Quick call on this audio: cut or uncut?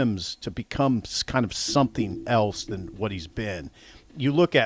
uncut